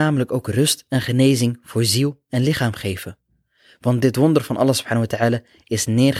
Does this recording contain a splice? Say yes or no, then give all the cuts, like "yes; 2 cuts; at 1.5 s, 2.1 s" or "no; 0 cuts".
no; 0 cuts